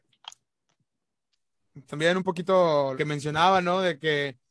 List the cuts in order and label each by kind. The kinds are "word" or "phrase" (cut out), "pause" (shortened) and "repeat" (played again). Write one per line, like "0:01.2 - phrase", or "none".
0:01.9 - word
0:02.9 - phrase